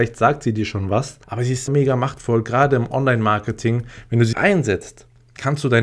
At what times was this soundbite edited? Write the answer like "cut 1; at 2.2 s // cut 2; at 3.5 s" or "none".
cut 1; at 1.2 s // cut 2; at 1.7 s // cut 3; at 4.3 s